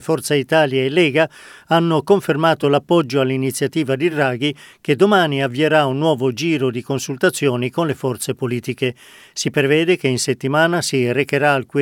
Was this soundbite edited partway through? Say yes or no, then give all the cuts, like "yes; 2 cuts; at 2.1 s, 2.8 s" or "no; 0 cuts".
no; 0 cuts